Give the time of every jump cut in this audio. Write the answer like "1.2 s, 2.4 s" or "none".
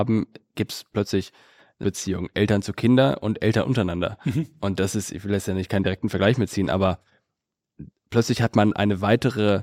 1.8 s